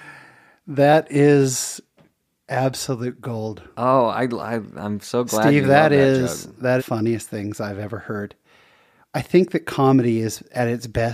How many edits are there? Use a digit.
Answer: 1